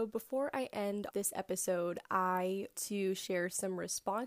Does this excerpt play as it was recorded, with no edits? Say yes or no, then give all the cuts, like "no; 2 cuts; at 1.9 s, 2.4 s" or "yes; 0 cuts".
no; 2 cuts; at 1.1 s, 2.7 s